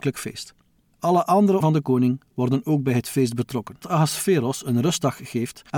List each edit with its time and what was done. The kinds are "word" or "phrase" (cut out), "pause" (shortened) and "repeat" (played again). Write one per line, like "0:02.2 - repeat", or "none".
0:01.6 - word
0:03.8 - word